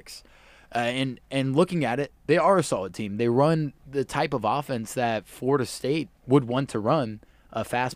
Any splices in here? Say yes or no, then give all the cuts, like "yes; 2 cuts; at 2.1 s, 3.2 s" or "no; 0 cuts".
yes; 2 cuts; at 2.2 s, 6.2 s